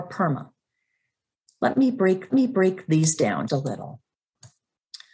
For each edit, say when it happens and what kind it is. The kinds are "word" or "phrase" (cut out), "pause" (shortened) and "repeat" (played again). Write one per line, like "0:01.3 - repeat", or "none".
0:02.3 - repeat
0:03.5 - word